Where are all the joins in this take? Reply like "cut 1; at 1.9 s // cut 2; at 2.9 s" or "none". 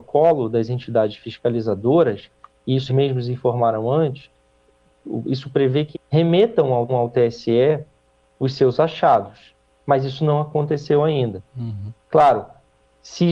cut 1; at 2.9 s // cut 2; at 5.9 s // cut 3; at 6.9 s // cut 4; at 9.6 s // cut 5; at 11.5 s